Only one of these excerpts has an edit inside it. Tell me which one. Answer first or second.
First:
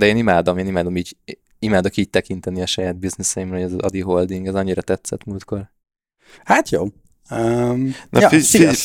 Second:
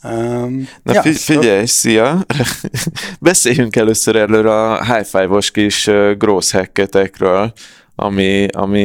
second